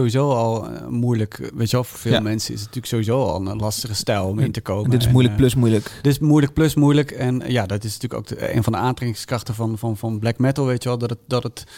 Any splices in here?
no; 0 cuts

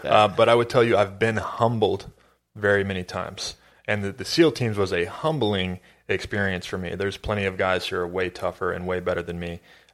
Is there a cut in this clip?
no; 0 cuts

